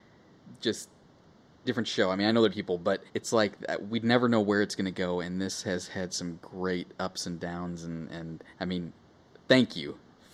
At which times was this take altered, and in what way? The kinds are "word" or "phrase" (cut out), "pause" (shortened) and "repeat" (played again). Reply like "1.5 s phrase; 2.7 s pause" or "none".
1.6 s phrase; 2.5 s word; 3.1 s pause; 8.5 s pause